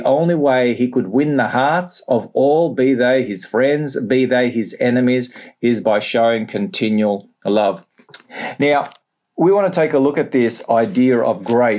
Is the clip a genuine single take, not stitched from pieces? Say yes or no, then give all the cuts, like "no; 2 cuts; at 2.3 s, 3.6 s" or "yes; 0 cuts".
yes; 0 cuts